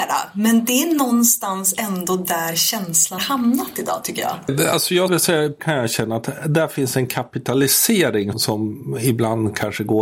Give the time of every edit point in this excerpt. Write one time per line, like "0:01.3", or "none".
0:03.2
0:05.1
0:05.6
0:08.3